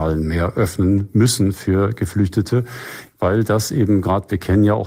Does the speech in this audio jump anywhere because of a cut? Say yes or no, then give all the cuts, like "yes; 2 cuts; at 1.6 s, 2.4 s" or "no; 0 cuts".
no; 0 cuts